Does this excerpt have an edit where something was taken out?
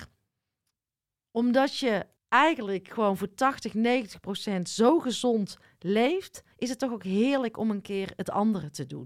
yes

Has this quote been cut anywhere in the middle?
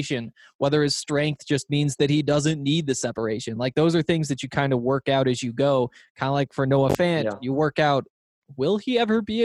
no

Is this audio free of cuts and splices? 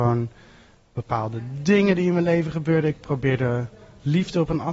yes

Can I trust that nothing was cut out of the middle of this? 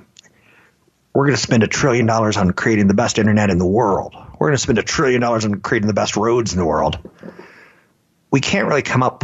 yes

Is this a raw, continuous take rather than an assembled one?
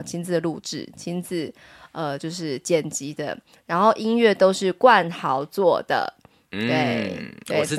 yes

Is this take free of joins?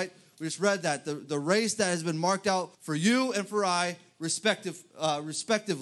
no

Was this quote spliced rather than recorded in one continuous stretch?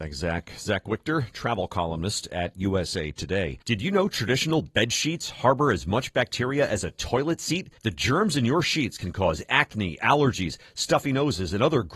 yes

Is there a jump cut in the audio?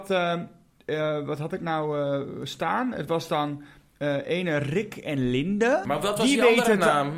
no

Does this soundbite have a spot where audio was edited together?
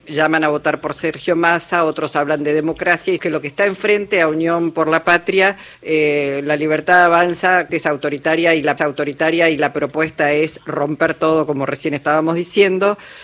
yes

